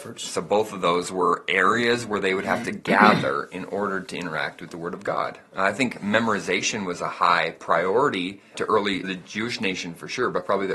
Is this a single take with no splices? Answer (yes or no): no